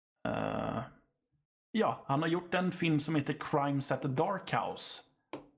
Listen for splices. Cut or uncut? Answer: uncut